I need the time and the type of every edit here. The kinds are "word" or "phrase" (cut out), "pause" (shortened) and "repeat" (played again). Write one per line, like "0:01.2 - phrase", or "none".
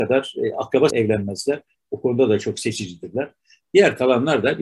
0:00.9 - phrase